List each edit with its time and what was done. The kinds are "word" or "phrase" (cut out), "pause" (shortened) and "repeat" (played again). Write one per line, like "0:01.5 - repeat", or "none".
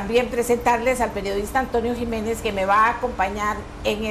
none